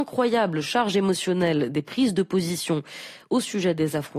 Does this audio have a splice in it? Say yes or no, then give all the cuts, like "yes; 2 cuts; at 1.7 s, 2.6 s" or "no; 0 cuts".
no; 0 cuts